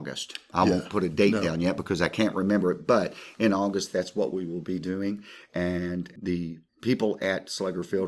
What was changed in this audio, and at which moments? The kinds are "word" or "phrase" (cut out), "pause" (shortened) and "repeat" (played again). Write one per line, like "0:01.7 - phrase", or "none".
0:06.7 - pause